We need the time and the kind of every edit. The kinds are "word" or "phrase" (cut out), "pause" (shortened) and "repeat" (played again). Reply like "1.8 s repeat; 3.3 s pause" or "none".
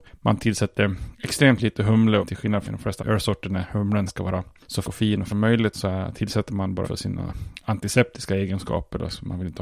2.2 s word; 2.6 s word; 3.0 s word; 4.1 s word; 4.8 s word; 5.3 s word; 5.7 s word; 6.8 s word

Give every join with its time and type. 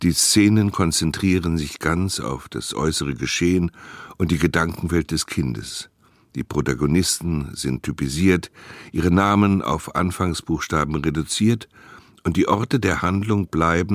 none

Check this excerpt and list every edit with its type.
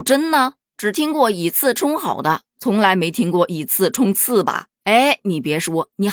4.7 s pause

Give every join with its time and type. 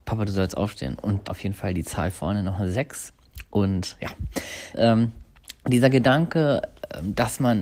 1.2 s phrase; 4.7 s word

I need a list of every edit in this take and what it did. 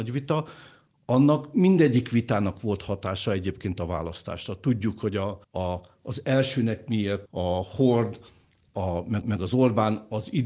5.4 s pause; 7.3 s word; 9.2 s repeat

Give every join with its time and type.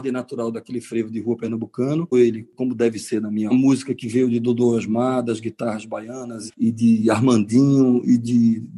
2.1 s phrase; 3.5 s phrase; 6.5 s word

